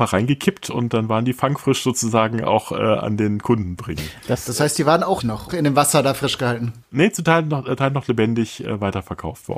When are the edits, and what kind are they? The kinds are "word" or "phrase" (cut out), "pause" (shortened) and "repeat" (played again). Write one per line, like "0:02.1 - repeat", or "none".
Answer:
0:03.8 - word
0:05.2 - word
0:05.5 - phrase
0:06.8 - pause
0:07.8 - word